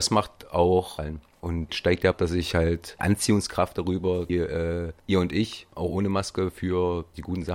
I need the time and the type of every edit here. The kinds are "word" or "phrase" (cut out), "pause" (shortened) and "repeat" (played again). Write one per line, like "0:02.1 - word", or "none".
0:01.0 - phrase
0:01.7 - phrase
0:02.1 - phrase
0:03.0 - phrase
0:04.3 - phrase